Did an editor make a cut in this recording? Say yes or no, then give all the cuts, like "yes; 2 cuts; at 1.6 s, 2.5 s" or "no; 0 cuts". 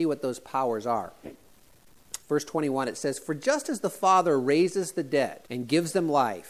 yes; 2 cuts; at 2.2 s, 5.5 s